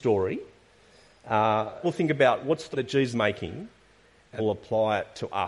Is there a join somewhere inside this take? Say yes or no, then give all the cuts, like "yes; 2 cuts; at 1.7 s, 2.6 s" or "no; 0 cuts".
yes; 4 cuts; at 1.8 s, 2.7 s, 3.1 s, 4.4 s